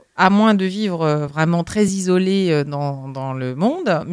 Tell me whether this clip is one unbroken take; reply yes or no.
yes